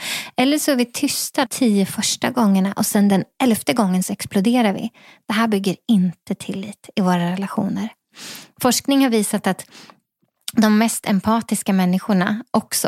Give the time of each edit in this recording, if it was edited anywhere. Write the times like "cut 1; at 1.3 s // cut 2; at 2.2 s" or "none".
cut 1; at 1.5 s